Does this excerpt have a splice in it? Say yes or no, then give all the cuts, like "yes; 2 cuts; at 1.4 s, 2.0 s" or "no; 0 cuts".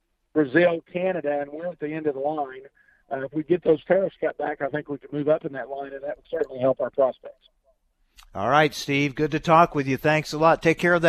no; 0 cuts